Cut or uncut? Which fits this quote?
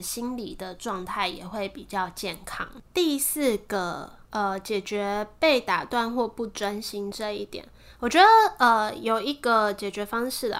cut